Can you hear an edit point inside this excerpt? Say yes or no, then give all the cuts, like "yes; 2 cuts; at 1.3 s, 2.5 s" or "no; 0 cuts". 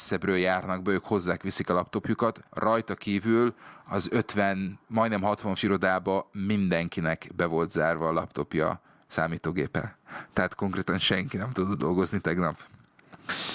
yes; 2 cuts; at 2.5 s, 5.6 s